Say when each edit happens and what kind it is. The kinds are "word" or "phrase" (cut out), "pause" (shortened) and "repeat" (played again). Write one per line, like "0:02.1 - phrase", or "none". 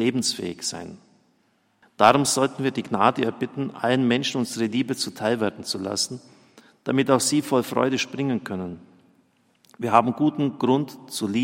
none